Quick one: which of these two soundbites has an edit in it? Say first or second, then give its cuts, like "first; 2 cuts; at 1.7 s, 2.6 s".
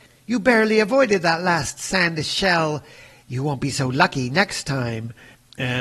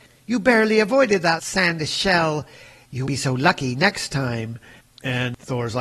second; 2 cuts; at 1.4 s, 3.1 s